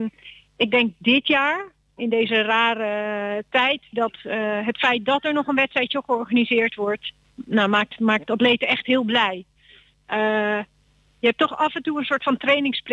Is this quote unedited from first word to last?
yes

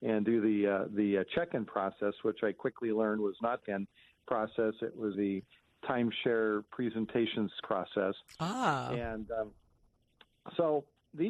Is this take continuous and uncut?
no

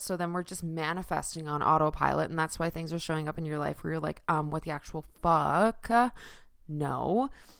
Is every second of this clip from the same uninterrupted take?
yes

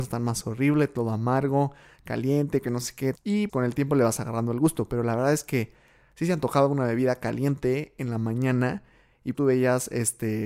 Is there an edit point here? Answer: yes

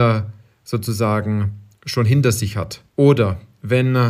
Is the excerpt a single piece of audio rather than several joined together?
no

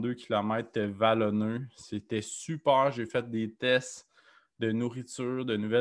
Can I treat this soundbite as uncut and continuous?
yes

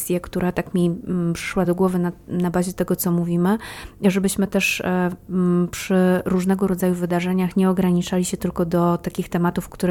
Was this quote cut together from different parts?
no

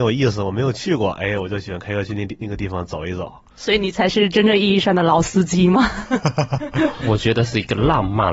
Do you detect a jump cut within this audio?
no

